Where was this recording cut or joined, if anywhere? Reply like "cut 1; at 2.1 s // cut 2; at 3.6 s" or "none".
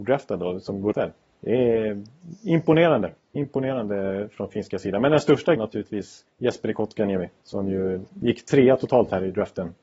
cut 1; at 0.9 s // cut 2; at 1.2 s // cut 3; at 3.2 s // cut 4; at 5.6 s // cut 5; at 6.3 s // cut 6; at 7.4 s